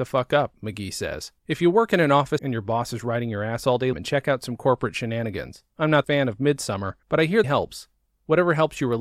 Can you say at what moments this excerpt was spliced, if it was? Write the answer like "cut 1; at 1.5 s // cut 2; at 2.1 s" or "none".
cut 1; at 1.4 s // cut 2; at 2.4 s // cut 3; at 3.9 s // cut 4; at 5.7 s // cut 5; at 6.0 s // cut 6; at 7.0 s // cut 7; at 7.4 s